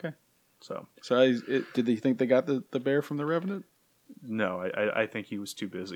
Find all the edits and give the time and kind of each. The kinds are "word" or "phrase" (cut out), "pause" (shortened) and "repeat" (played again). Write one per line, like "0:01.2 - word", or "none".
0:00.9 - pause